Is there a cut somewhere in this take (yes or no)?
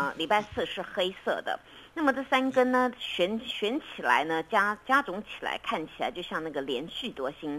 no